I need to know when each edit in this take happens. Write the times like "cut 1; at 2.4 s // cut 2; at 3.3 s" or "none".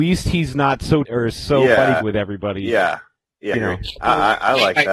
cut 1; at 1.0 s // cut 2; at 2.0 s // cut 3; at 3.5 s